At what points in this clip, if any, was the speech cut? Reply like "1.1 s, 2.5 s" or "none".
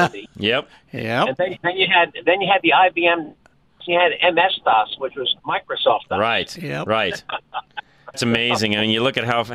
1.6 s, 3.9 s, 5.4 s, 8.1 s